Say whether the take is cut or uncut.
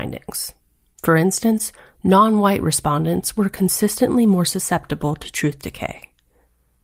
uncut